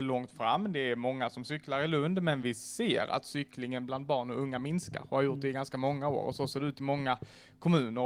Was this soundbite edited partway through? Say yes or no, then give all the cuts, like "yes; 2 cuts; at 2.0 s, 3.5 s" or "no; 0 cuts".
no; 0 cuts